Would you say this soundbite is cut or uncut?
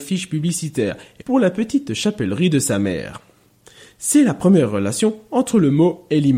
cut